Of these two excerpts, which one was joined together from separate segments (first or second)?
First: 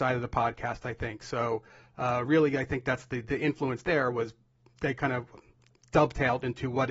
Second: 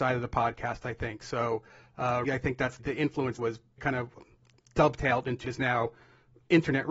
second